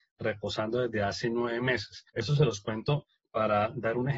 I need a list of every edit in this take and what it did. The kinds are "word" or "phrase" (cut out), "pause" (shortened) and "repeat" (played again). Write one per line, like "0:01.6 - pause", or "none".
0:02.1 - pause
0:03.2 - word

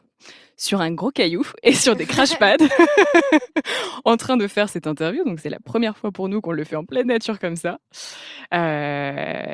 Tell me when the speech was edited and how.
none

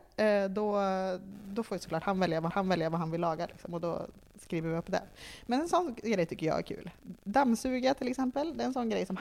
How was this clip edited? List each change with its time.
0:02.5 - repeat

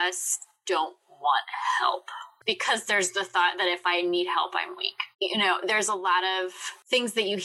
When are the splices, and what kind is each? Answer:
0:05.1 - pause

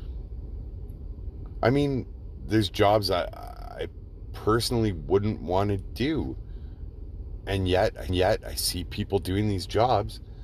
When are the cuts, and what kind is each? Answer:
0:08.1 - repeat

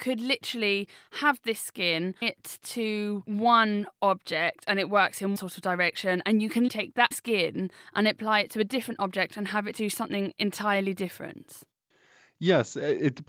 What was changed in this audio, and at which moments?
0:02.2 - word
0:05.4 - word
0:06.7 - word
0:07.1 - word

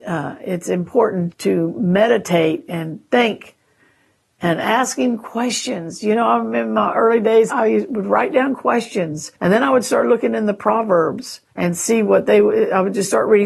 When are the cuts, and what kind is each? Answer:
0:01.3 - word
0:07.5 - word
0:09.3 - pause
0:11.5 - pause

